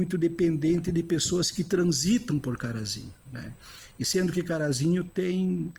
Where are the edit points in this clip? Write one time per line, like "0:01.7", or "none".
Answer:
0:03.2

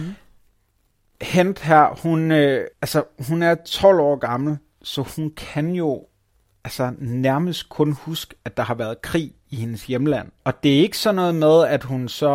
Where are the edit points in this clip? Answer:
0:02.7
0:10.4

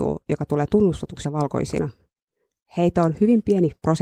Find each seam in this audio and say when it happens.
0:01.2

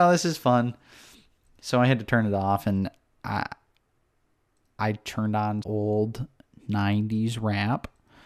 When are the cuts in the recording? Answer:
0:05.6

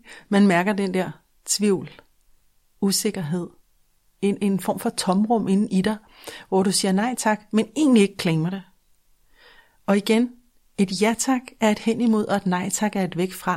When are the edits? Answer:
none

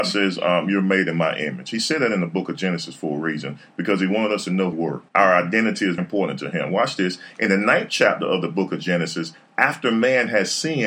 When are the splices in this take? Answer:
0:04.7
0:05.1
0:06.0

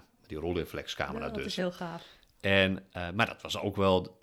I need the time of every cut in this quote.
none

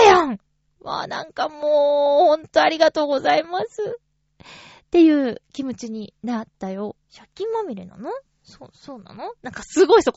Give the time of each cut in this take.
0:07.0

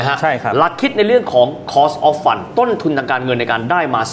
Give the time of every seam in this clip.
none

